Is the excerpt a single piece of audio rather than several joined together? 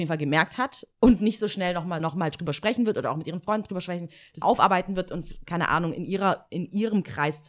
no; 2 cuts; at 2.0 s, 4.4 s

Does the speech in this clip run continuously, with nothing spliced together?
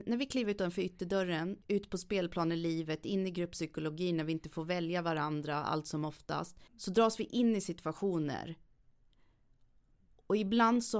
no; 2 cuts; at 1.6 s, 6.7 s

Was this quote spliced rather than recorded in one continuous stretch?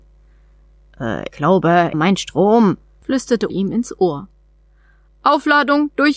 yes; 3 cuts; at 1.3 s, 1.9 s, 3.5 s

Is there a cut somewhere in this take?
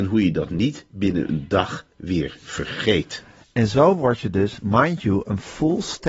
no; 0 cuts

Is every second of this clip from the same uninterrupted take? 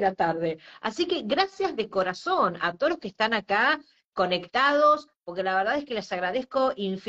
yes; 0 cuts

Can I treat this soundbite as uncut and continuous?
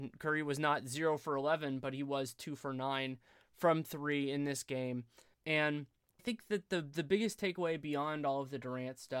no; 1 cut; at 6.2 s

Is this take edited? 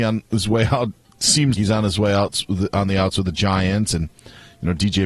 yes; 1 cut; at 1.5 s

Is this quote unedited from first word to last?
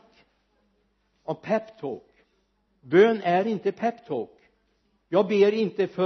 yes; 0 cuts

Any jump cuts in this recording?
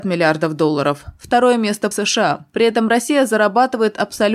yes; 1 cut; at 1.9 s

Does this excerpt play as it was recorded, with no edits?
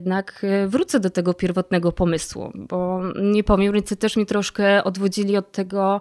yes; 0 cuts

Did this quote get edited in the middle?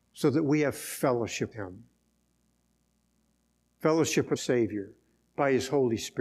yes; 2 cuts; at 1.5 s, 4.4 s

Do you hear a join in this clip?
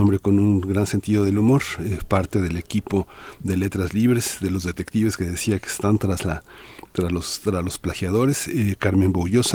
no; 0 cuts

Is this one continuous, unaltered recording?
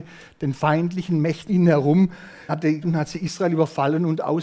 no; 3 cuts; at 1.5 s, 2.5 s, 2.8 s

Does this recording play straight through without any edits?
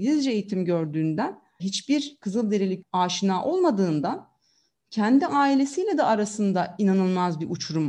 no; 2 cuts; at 1.6 s, 2.8 s

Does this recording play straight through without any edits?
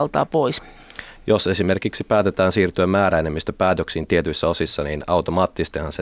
yes; 0 cuts

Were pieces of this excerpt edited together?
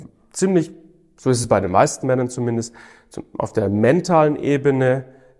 no; 0 cuts

